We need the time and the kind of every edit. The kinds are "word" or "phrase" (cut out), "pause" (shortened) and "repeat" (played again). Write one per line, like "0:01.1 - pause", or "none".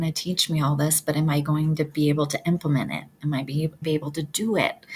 0:03.8 - phrase